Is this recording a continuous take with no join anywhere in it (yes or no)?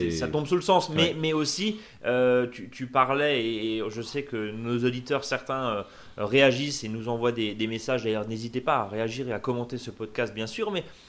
yes